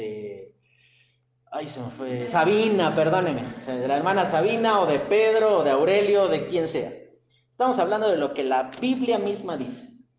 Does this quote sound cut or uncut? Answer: uncut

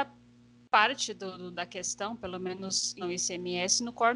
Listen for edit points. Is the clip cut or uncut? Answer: cut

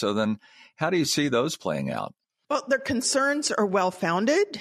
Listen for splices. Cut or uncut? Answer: uncut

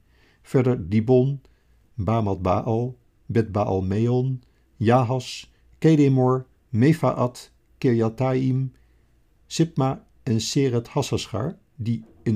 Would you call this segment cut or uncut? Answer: uncut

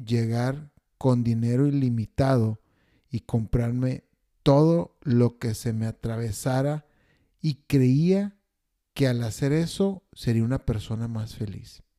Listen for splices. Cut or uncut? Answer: uncut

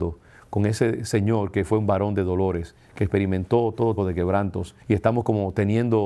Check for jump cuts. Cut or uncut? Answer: cut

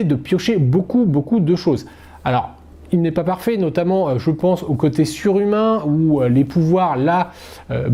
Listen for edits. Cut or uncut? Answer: uncut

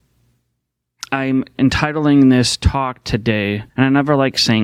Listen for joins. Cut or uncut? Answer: cut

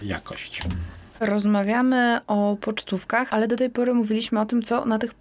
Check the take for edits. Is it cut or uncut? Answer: cut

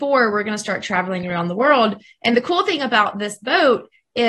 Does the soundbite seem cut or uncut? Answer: uncut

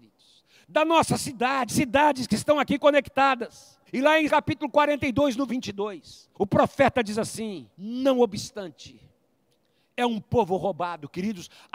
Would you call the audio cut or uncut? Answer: cut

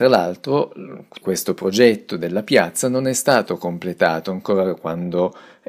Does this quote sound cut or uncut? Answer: cut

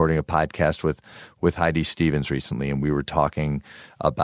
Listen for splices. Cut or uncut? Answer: uncut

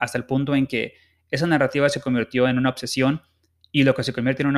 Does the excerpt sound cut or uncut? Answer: uncut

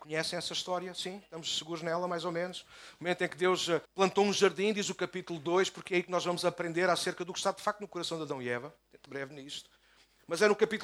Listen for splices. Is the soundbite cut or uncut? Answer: cut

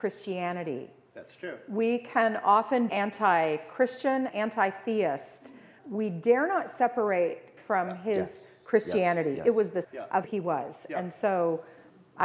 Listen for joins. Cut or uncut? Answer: cut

